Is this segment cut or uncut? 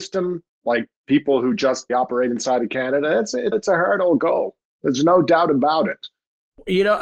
cut